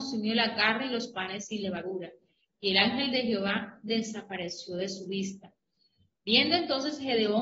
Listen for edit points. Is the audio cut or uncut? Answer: uncut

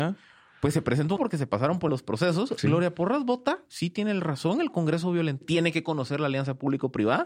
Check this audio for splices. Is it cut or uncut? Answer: cut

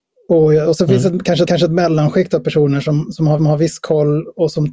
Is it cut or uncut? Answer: cut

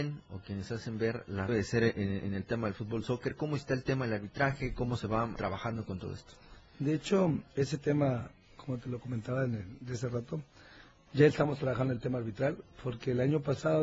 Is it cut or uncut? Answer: cut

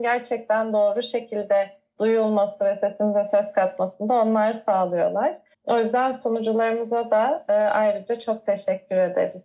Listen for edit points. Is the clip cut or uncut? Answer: cut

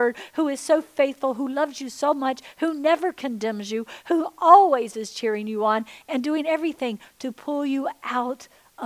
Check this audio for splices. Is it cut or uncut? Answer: uncut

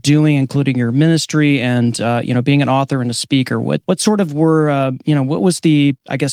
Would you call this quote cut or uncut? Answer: cut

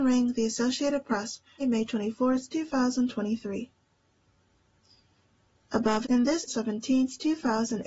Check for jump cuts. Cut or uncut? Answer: cut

